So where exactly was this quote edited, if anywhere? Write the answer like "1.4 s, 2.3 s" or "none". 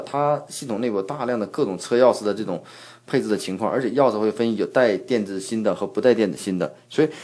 none